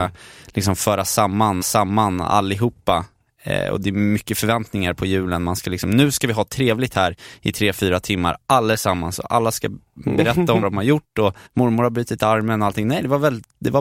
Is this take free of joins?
no; 3 cuts; at 1.6 s, 10.6 s, 11.5 s

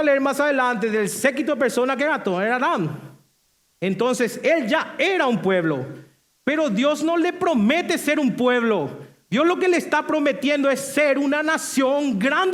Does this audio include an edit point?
no; 0 cuts

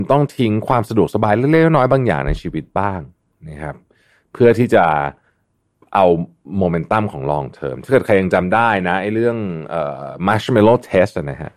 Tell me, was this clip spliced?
no; 0 cuts

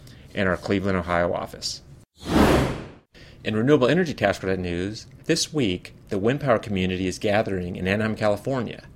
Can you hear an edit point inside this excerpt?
yes; 1 cut; at 5.2 s

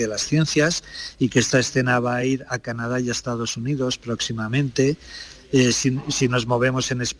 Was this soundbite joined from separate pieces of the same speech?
no; 0 cuts

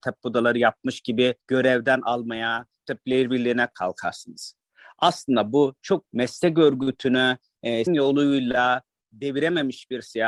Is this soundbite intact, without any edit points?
no; 5 cuts; at 1.4 s, 2.8 s, 3.7 s, 6.1 s, 7.9 s

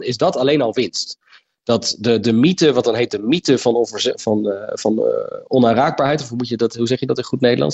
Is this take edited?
no; 0 cuts

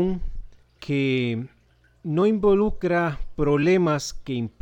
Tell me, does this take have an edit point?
no; 0 cuts

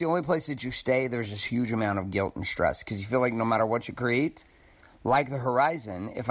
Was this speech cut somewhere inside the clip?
no; 0 cuts

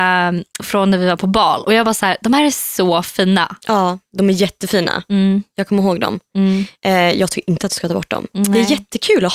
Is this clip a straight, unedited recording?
yes; 0 cuts

